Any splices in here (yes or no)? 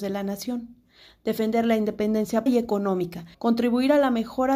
yes